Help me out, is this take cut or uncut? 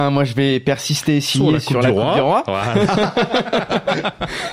uncut